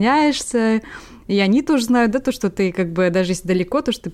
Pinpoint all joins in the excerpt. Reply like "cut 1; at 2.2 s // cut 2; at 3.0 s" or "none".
none